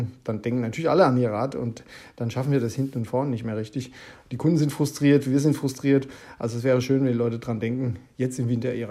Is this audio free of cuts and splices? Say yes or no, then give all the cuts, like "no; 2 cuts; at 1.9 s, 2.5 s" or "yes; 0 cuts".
yes; 0 cuts